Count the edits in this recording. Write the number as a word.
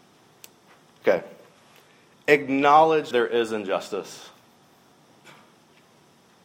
one